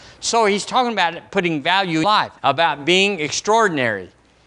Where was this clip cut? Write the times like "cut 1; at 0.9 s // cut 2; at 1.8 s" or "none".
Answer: cut 1; at 2.0 s // cut 2; at 2.4 s